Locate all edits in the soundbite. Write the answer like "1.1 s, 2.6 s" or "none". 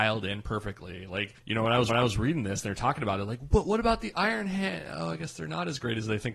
1.4 s, 1.9 s